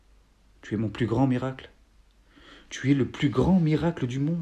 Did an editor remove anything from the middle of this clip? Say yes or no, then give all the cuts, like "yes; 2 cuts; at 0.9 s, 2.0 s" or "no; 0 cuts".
no; 0 cuts